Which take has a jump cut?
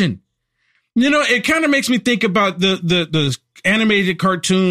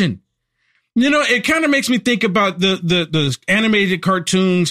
second; 1 cut; at 3.4 s

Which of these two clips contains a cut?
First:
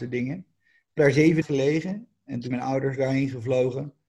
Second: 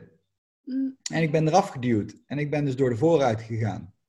first; 3 cuts; at 1.0 s, 1.4 s, 2.5 s

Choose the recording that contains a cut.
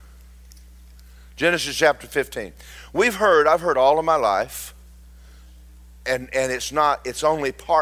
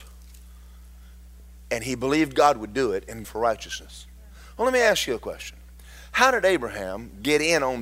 second; 1 cut; at 3.2 s

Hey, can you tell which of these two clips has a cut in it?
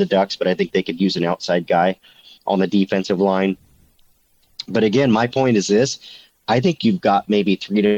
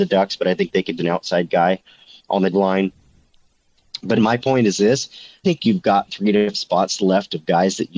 second; 6 cuts; at 1.0 s, 2.5 s, 4.2 s, 5.4 s, 6.1 s, 6.5 s

